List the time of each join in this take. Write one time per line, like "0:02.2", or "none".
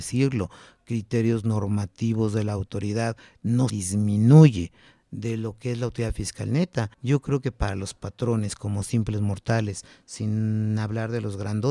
0:03.7
0:06.9